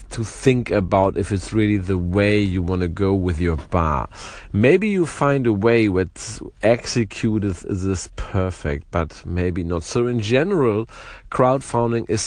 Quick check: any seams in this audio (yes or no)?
no